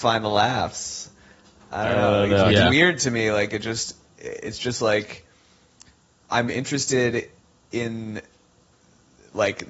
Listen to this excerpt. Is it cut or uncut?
uncut